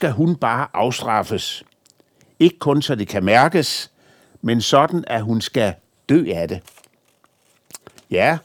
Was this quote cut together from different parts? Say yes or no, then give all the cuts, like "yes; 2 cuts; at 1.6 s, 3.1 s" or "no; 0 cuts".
no; 0 cuts